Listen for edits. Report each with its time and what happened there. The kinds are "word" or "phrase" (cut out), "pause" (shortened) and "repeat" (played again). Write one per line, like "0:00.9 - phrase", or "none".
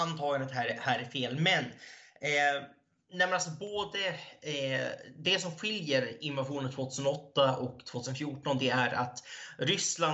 none